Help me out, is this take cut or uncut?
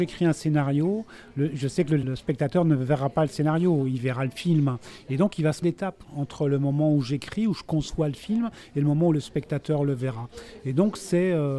cut